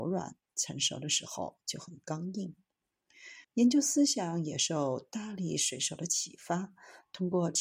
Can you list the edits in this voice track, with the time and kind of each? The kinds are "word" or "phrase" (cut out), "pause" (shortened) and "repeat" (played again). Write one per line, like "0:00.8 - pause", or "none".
0:03.4 - pause